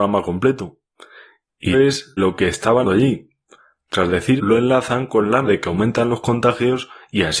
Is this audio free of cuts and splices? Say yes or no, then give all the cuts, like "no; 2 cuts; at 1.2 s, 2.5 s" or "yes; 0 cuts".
no; 5 cuts; at 1.7 s, 2.2 s, 2.8 s, 4.4 s, 5.4 s